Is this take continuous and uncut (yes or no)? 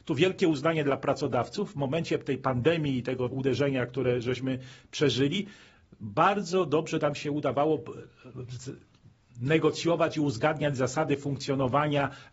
no